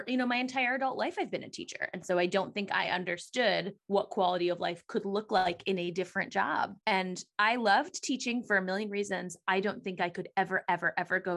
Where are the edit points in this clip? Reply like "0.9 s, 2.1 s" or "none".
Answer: 3.8 s, 6.8 s